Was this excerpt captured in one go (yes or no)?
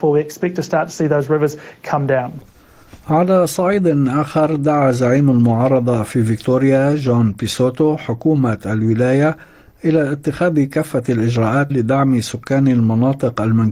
no